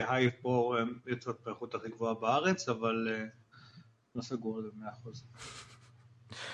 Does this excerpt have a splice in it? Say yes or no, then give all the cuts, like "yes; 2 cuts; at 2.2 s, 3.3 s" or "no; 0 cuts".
no; 0 cuts